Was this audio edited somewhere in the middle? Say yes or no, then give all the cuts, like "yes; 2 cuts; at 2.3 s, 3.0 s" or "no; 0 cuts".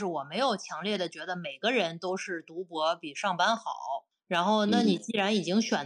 no; 0 cuts